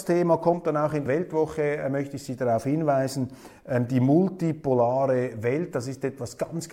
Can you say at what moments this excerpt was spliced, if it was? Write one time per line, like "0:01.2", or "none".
0:01.1